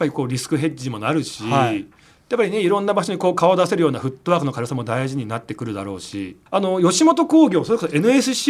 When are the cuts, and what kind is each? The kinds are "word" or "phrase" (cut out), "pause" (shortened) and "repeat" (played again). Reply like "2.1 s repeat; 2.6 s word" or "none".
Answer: 6.5 s pause

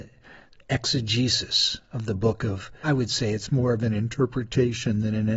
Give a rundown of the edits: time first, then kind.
2.8 s word

